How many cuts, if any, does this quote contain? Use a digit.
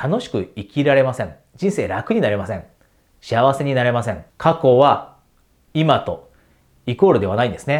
1